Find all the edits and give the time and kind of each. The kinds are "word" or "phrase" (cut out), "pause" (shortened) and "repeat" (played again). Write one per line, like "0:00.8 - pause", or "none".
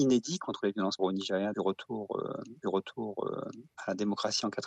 0:01.0 - word
0:01.5 - word
0:02.6 - repeat

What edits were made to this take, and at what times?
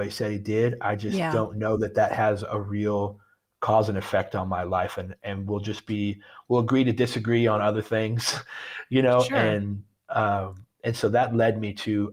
none

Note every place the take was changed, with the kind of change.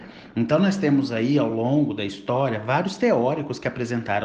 none

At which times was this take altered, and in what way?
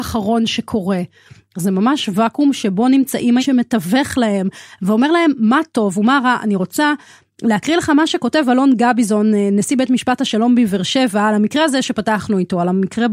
0:03.4 - phrase

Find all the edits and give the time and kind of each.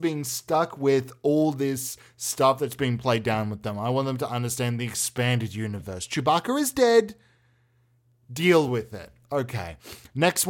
none

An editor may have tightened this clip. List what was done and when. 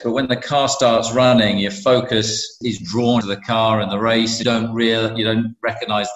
0:03.2 - word
0:04.4 - word

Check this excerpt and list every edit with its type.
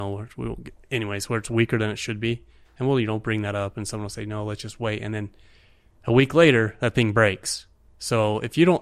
none

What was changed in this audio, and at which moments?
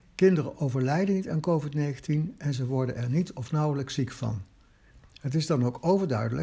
none

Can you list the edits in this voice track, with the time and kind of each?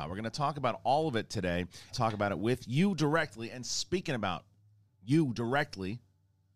0:01.9 - phrase

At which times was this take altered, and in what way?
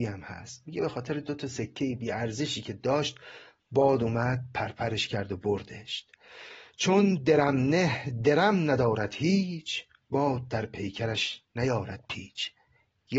none

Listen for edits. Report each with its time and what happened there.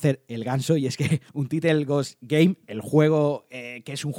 0:01.3 - pause

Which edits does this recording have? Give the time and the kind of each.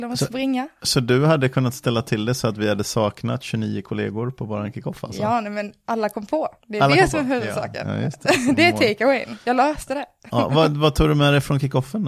0:06.6 - pause

